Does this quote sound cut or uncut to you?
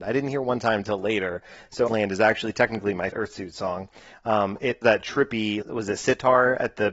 cut